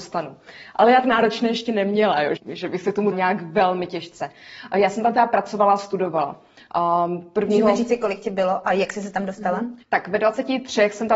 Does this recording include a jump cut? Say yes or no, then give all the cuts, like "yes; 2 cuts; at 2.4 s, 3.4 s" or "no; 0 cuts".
yes; 4 cuts; at 1.0 s, 2.4 s, 3.1 s, 9.8 s